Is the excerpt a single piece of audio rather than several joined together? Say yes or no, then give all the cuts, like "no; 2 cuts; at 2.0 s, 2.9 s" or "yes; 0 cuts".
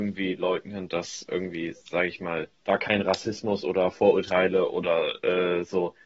yes; 0 cuts